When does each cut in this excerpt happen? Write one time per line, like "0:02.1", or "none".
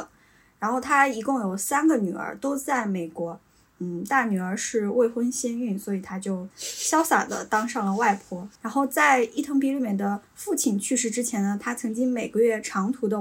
0:08.6